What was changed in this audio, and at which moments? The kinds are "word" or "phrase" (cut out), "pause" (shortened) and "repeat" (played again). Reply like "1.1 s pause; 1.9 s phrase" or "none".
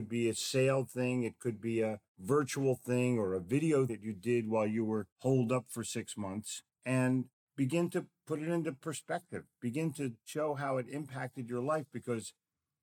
3.9 s word; 6.7 s pause